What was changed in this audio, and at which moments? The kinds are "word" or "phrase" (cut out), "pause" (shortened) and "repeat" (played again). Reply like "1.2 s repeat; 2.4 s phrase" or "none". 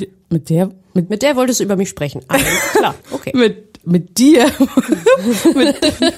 3.0 s pause; 3.8 s word